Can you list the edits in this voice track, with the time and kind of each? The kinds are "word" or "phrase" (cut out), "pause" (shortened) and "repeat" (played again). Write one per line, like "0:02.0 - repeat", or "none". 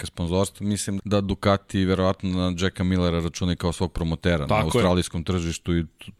0:01.0 - word
0:04.5 - word